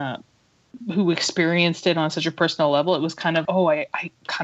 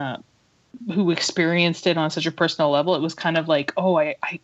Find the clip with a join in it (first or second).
first